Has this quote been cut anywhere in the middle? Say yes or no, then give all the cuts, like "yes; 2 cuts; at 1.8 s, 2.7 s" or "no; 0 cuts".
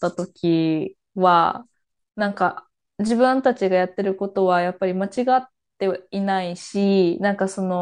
no; 0 cuts